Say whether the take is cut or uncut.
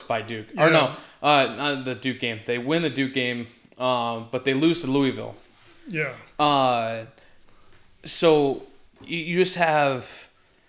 uncut